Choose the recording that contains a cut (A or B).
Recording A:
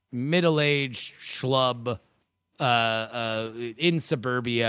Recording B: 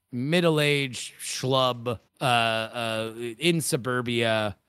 B